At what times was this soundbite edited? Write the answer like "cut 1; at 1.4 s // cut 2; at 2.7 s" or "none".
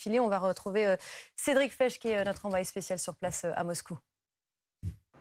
none